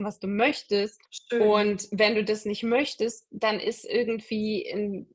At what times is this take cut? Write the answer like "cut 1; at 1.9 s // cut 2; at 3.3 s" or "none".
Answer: cut 1; at 1.0 s